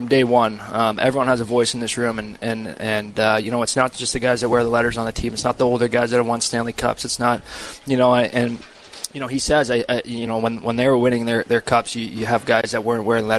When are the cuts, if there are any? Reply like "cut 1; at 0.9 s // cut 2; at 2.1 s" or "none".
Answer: none